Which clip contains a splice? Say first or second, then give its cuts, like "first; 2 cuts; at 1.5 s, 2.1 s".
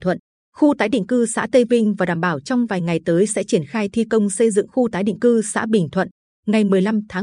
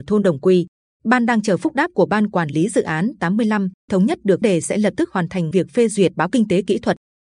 second; 4 cuts; at 3.9 s, 4.4 s, 5.5 s, 6.3 s